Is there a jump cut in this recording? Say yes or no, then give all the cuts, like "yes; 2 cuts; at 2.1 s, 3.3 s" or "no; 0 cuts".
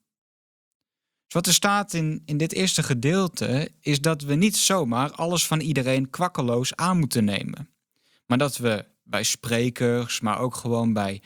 no; 0 cuts